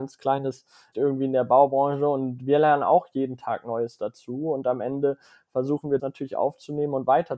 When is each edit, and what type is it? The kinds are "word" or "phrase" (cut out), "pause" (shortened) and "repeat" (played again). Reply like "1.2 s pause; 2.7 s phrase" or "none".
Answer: 0.9 s word; 6.0 s word